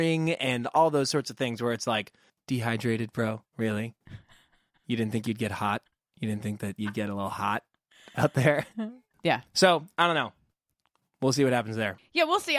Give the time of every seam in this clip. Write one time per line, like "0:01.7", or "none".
0:05.9